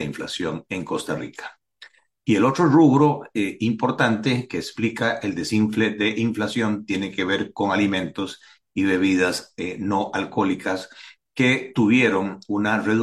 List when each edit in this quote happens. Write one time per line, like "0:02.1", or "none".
none